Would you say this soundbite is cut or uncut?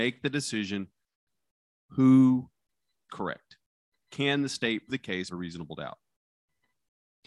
cut